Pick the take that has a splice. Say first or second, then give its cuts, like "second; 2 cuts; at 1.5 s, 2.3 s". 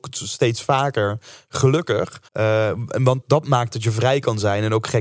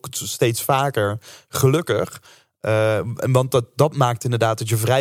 first; 3 cuts; at 2.3 s, 3.2 s, 3.7 s